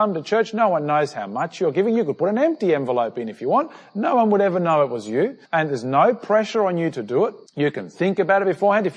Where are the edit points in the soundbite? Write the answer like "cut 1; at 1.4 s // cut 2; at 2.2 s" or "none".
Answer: cut 1; at 5.5 s // cut 2; at 7.5 s